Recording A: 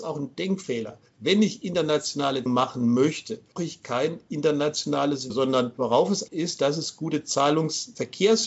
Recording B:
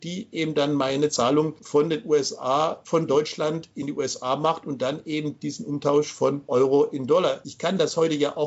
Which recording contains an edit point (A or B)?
A